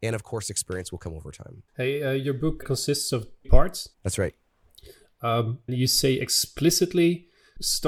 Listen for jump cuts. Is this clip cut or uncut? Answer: cut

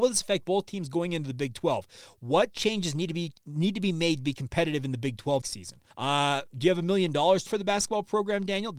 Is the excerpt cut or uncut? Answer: cut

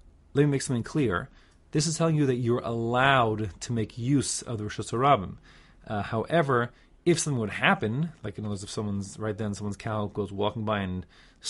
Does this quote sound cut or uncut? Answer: uncut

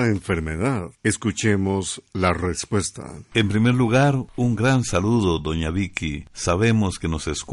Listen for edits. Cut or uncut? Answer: uncut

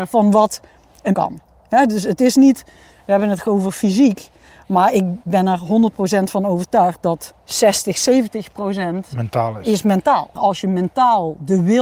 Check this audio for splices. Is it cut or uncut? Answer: cut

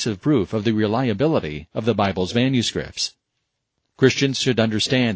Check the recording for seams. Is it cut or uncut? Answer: uncut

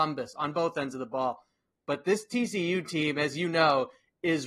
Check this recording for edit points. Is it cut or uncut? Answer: uncut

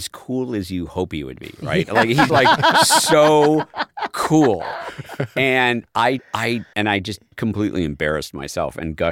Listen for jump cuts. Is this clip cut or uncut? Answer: cut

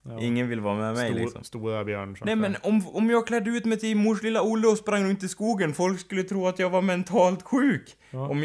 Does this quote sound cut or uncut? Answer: uncut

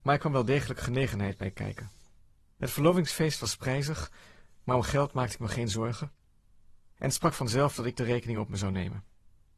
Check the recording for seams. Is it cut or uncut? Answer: uncut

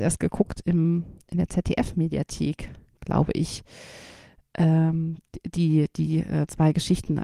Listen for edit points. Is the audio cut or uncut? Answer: uncut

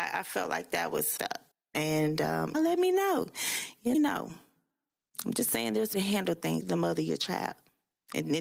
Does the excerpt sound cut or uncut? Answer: cut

